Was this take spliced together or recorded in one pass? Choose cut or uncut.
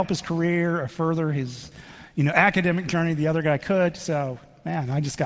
uncut